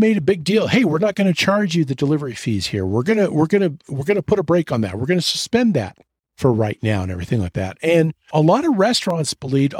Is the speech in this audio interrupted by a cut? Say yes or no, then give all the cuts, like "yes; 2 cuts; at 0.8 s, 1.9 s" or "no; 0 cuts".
yes; 1 cut; at 8.3 s